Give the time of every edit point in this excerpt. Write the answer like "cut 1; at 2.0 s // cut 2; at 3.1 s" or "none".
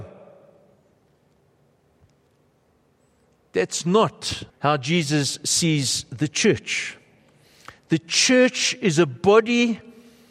cut 1; at 4.5 s